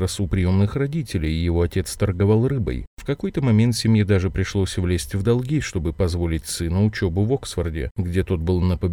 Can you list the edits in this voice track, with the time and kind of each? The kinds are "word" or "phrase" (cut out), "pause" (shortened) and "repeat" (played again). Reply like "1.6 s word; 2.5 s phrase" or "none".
none